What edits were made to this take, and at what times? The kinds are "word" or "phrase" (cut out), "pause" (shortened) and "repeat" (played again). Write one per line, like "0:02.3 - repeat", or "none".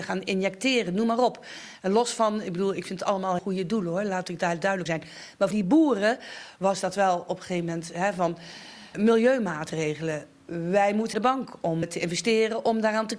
0:03.4 - word
0:04.9 - word
0:05.5 - word
0:08.9 - word
0:11.1 - word
0:11.8 - word

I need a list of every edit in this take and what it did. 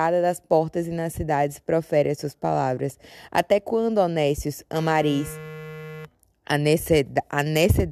none

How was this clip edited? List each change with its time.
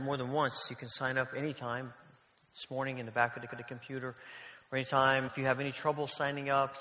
0:03.5 - repeat
0:05.3 - word

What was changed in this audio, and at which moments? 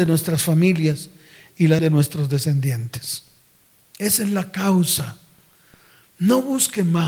0:01.8 - word

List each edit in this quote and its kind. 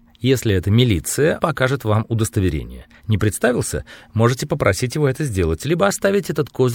0:01.4 - word

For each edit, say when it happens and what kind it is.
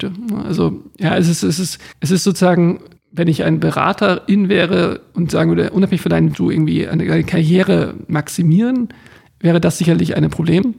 0:01.9 - pause
0:03.0 - pause
0:06.3 - phrase

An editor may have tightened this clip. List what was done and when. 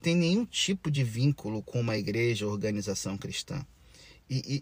none

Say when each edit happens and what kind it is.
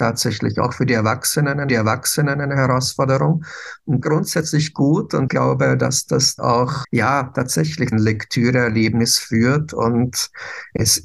0:01.7 - repeat
0:04.0 - phrase
0:05.3 - word
0:06.4 - word
0:06.8 - word
0:07.9 - phrase

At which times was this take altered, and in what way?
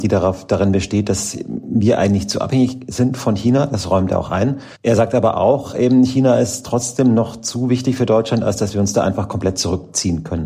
0:04.7 - pause

